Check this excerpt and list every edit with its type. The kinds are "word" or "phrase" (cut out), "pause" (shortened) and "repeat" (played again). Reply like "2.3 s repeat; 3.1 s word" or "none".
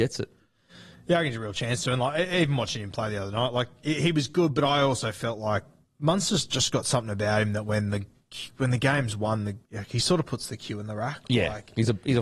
5.9 s pause; 9.6 s pause

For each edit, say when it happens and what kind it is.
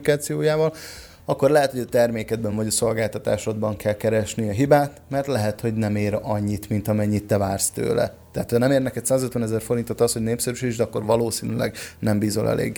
none

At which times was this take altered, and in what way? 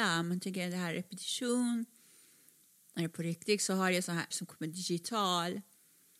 4.3 s word

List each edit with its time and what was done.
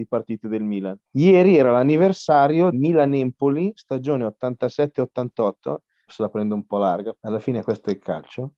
1.1 s pause; 2.7 s word; 6.1 s word; 7.1 s word

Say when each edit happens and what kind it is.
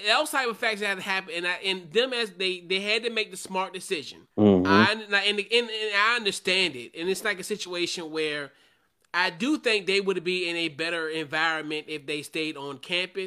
4.3 s pause

